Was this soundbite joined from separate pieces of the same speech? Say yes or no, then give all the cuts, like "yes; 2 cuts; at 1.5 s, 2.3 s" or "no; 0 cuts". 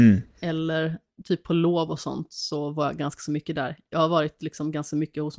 no; 0 cuts